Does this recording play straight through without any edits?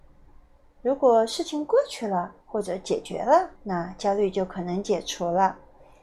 no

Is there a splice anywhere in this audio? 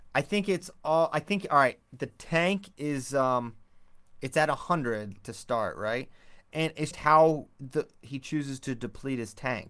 yes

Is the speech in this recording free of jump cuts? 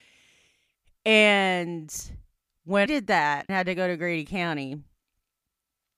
no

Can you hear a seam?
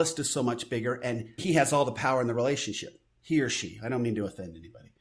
yes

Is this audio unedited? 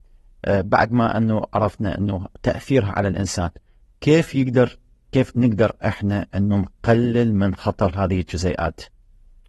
yes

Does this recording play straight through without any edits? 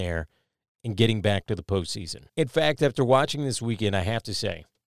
no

